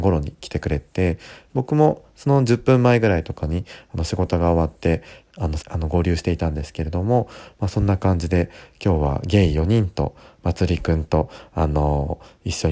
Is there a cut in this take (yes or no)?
yes